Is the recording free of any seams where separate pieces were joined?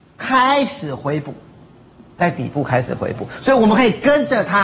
yes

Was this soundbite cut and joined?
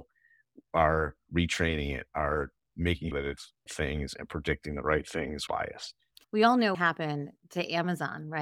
yes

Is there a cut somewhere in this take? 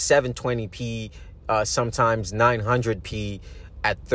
no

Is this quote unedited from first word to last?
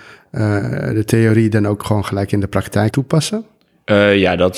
no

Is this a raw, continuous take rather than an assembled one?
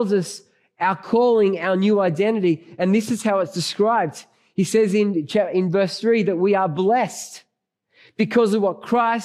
yes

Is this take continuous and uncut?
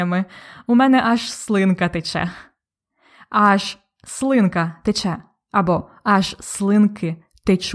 yes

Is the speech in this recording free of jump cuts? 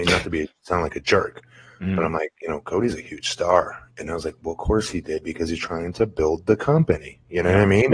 yes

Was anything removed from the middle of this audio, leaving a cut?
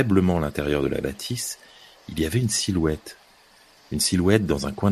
no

